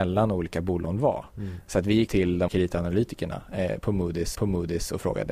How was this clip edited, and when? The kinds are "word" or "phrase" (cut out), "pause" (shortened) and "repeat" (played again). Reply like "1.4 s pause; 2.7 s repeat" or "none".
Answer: 2.1 s word; 2.5 s word; 4.3 s repeat